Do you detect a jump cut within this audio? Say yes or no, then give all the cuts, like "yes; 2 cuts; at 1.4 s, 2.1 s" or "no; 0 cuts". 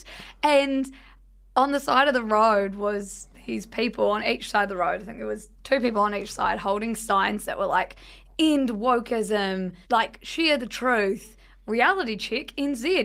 yes; 2 cuts; at 5.6 s, 9.8 s